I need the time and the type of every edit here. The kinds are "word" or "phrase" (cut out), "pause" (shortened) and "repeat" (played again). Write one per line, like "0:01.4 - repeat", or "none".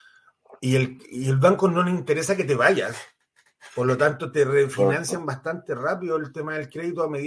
none